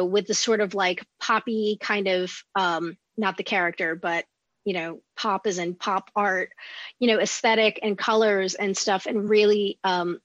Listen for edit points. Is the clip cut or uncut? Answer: uncut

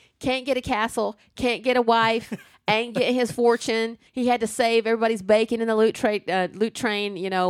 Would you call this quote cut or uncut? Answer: cut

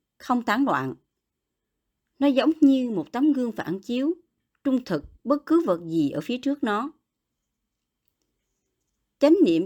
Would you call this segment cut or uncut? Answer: uncut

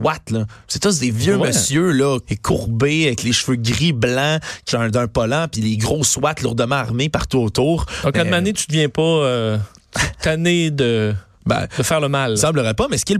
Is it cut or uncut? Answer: cut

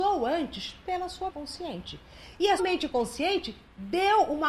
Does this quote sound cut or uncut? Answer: cut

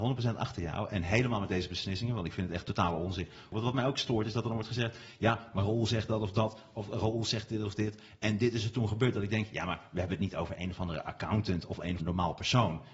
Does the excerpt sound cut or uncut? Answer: cut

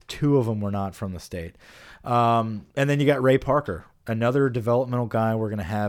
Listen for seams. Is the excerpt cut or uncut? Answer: cut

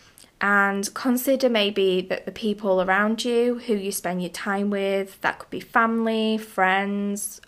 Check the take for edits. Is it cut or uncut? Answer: uncut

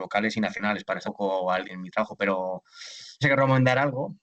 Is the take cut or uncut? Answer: cut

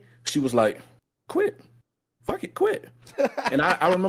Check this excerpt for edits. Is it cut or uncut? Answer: uncut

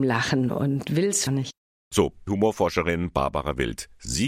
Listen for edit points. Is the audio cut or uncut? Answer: cut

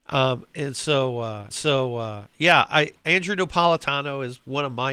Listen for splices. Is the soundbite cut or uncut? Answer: cut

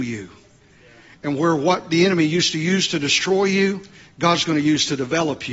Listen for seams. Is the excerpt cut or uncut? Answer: uncut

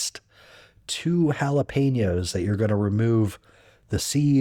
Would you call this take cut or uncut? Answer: uncut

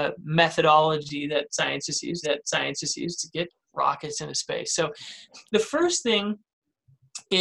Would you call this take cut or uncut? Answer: cut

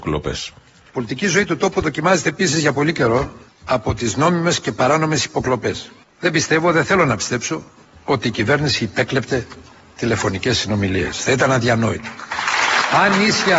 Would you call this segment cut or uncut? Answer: uncut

